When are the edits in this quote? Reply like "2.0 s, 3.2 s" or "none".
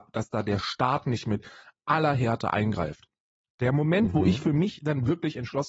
none